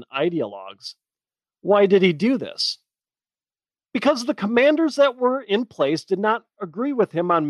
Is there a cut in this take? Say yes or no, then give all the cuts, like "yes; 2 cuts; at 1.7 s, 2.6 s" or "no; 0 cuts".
no; 0 cuts